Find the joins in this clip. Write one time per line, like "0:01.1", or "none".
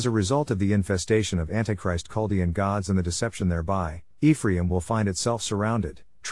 none